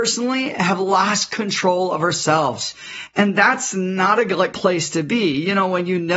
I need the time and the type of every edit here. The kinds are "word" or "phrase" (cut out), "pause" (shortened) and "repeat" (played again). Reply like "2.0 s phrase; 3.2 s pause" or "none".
4.5 s word